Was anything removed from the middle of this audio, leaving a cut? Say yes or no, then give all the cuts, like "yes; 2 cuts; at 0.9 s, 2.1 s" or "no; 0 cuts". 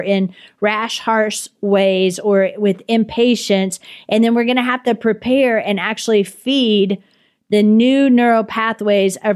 no; 0 cuts